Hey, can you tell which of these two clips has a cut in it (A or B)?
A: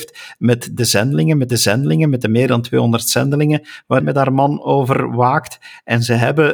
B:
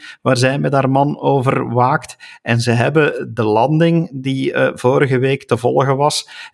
A